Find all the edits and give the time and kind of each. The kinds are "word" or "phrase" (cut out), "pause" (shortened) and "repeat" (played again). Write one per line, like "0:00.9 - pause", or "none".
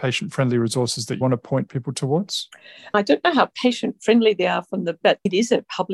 0:01.2 - word
0:05.0 - word